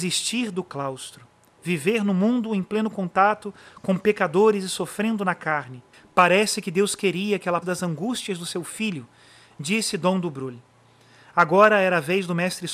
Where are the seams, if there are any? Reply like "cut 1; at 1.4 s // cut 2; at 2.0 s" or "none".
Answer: cut 1; at 7.6 s